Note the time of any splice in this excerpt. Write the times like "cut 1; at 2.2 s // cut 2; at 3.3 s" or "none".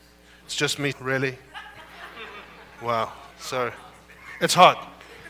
cut 1; at 0.9 s // cut 2; at 3.3 s